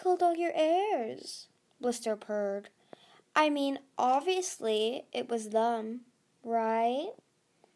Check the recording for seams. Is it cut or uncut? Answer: uncut